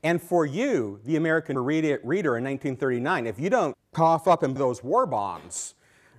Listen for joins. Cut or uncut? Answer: cut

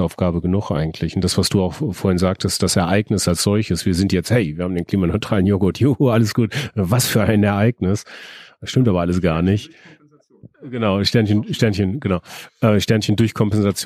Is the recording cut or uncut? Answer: uncut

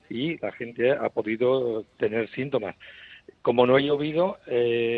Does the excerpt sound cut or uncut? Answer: uncut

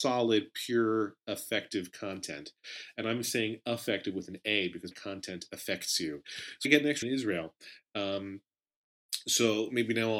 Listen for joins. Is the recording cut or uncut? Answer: cut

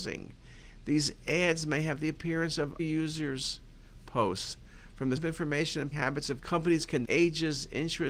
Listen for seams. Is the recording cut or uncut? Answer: cut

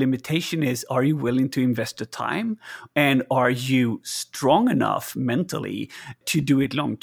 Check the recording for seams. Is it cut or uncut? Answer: uncut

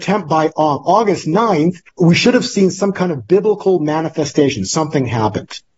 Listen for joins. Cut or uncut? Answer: cut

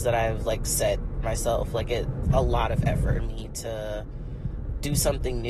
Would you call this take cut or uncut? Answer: cut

